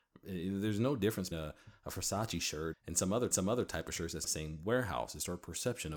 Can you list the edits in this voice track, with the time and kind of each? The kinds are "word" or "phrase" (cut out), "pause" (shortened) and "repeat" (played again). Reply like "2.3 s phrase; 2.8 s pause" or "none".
1.3 s word; 2.7 s word; 3.3 s repeat; 4.3 s phrase